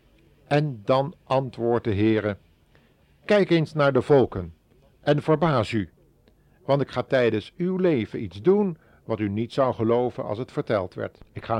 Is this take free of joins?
yes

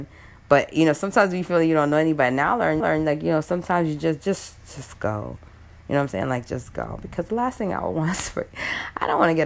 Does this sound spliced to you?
yes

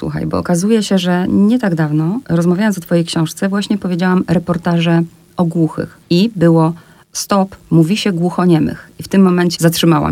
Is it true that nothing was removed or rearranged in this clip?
yes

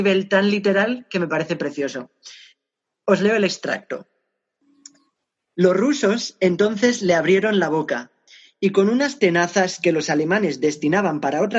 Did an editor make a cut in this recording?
no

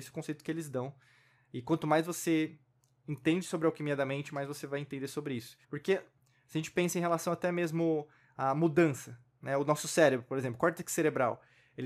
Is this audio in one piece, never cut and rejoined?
no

